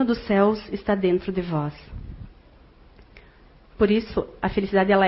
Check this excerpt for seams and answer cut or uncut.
uncut